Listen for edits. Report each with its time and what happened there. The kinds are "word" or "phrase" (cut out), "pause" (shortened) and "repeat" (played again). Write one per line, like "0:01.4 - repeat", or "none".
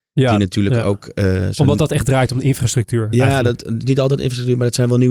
none